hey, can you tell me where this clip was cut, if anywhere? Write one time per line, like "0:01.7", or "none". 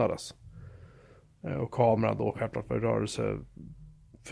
none